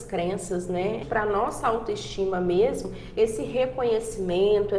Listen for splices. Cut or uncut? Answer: cut